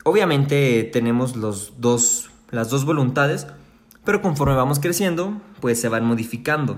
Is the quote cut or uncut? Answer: uncut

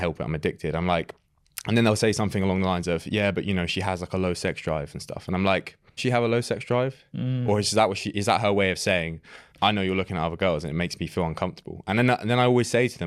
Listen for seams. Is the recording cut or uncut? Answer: cut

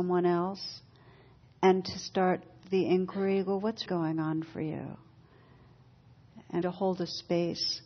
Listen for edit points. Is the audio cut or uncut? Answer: cut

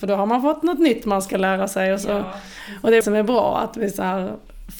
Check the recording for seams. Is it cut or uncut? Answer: cut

